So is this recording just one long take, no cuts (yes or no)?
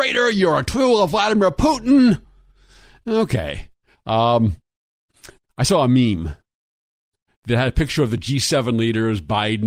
yes